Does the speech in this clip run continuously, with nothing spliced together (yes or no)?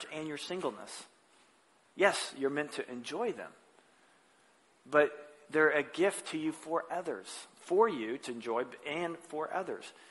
yes